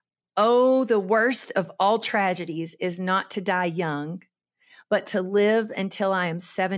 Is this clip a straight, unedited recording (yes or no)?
yes